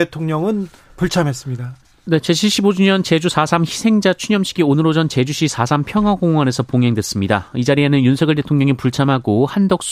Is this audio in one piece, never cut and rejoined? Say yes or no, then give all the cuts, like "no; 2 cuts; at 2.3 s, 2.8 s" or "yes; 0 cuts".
yes; 0 cuts